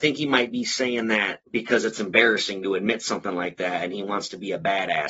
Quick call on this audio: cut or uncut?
cut